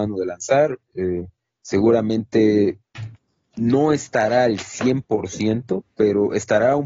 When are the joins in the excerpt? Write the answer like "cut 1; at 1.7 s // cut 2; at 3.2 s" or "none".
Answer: none